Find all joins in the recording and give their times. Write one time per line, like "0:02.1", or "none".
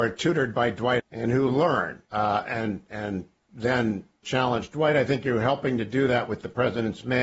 0:01.0
0:02.0
0:04.2